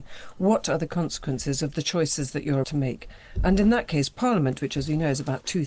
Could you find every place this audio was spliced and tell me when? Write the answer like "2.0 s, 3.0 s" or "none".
2.6 s